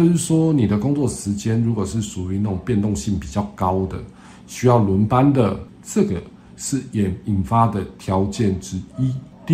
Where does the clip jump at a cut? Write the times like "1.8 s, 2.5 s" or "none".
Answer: none